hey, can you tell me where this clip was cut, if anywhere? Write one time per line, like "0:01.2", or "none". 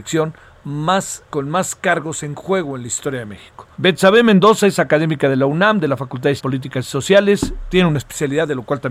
0:01.3
0:03.7
0:06.4